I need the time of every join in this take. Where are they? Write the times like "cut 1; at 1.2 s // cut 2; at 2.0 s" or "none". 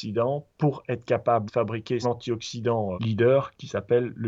cut 1; at 1.5 s // cut 2; at 2.0 s // cut 3; at 2.9 s